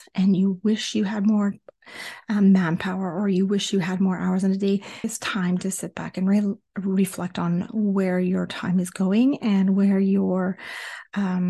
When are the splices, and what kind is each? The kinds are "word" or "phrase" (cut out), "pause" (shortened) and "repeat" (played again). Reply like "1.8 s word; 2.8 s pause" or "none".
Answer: 5.0 s word